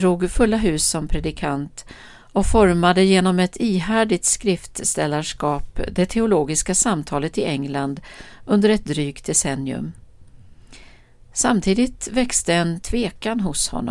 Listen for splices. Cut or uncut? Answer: uncut